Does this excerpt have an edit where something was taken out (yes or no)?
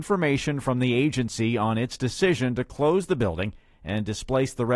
no